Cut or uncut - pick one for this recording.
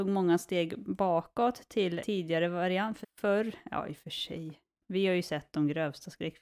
cut